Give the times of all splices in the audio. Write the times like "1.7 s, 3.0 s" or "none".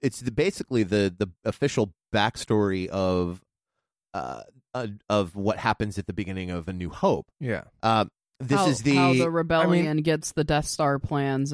none